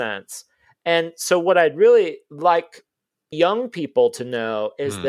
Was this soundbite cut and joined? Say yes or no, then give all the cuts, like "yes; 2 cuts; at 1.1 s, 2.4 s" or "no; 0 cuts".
yes; 1 cut; at 3.3 s